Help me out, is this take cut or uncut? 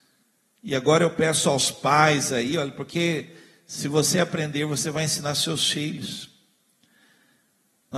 uncut